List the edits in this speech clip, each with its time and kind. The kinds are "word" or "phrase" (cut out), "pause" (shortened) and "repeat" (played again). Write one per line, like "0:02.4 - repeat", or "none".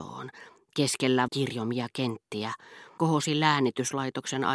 0:01.3 - word
0:03.0 - word